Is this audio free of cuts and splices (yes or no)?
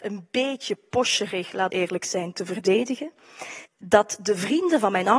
no